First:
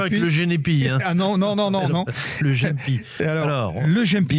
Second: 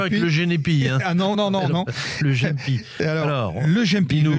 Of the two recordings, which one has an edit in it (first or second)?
second